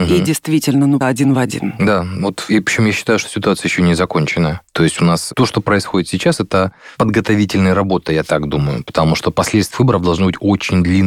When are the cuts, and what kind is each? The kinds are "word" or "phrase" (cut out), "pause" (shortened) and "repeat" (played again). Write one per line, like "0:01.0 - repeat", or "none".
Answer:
0:01.0 - word
0:04.7 - pause
0:09.7 - word